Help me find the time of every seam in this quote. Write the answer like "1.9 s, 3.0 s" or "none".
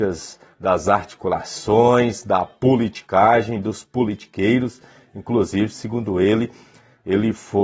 none